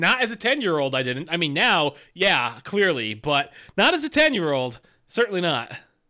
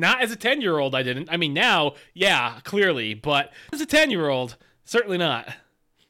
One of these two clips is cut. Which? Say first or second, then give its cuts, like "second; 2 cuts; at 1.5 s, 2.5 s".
second; 1 cut; at 3.7 s